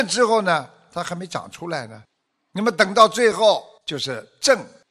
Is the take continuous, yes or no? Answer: no